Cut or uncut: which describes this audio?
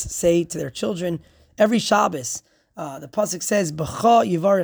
uncut